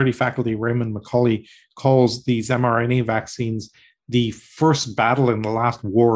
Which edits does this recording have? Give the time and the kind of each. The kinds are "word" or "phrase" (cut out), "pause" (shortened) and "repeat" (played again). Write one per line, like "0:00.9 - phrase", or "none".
none